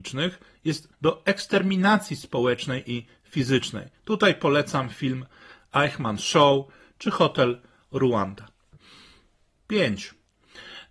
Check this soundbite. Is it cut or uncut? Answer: cut